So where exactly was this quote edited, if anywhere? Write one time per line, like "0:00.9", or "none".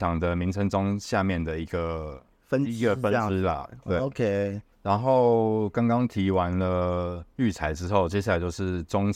0:04.7